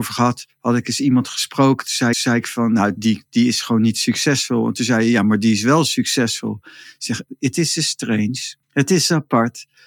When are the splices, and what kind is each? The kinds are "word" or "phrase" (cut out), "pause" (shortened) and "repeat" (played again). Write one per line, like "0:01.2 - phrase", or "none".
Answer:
0:02.1 - repeat
0:03.0 - word
0:08.6 - pause

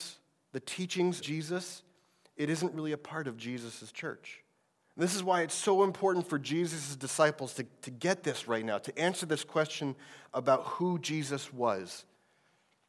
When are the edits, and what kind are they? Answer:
0:01.2 - word
0:04.6 - pause

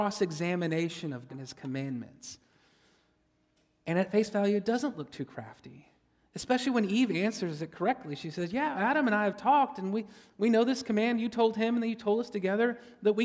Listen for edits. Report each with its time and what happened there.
0:01.3 - word
0:08.7 - word

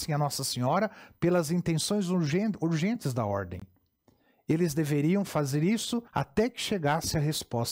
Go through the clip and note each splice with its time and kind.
0:06.1 - pause

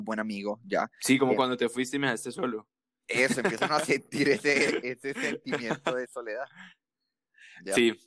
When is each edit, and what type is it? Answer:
none

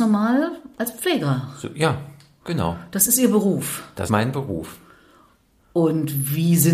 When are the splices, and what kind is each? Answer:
0:04.1 - word

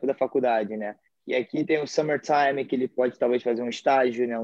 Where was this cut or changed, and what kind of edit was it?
0:01.1 - pause

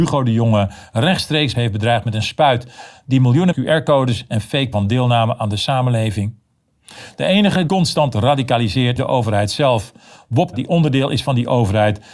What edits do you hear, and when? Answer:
0:01.5 - phrase
0:03.5 - phrase
0:04.7 - word
0:07.7 - word
0:09.0 - word
0:10.5 - word

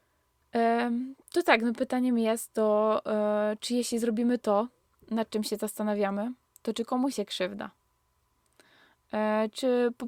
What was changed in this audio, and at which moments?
0:01.8 - word
0:07.1 - word

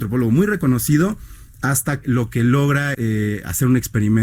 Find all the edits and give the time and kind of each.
0:02.0 - word
0:02.9 - word

